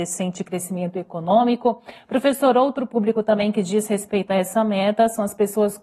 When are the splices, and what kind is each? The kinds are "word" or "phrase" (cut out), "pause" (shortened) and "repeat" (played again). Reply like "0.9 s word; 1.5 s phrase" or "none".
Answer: none